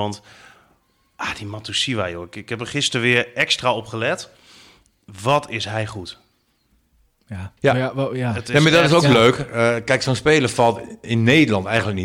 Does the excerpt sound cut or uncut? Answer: cut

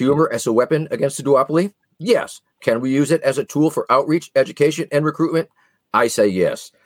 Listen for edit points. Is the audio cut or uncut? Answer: uncut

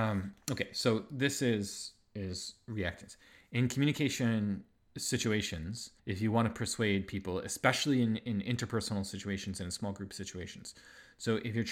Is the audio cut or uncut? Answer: cut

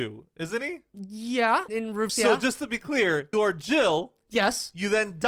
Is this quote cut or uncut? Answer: cut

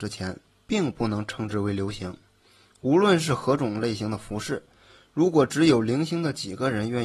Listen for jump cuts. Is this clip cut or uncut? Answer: uncut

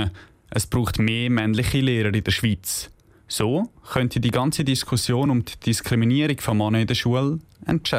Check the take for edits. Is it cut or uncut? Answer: uncut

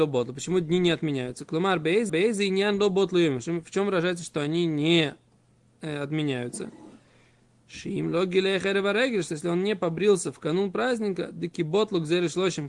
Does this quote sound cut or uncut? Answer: cut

